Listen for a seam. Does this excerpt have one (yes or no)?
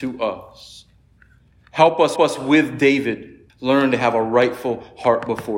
yes